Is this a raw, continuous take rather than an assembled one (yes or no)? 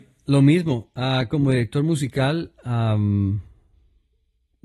yes